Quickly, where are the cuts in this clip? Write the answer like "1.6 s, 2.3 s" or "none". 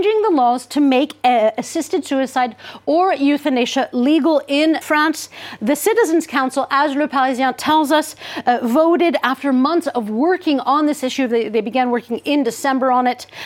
4.8 s